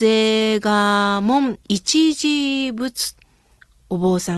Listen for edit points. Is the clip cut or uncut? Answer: cut